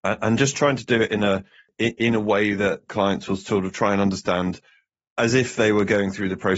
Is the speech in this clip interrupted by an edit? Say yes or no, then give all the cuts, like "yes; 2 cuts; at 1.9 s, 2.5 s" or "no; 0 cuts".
no; 0 cuts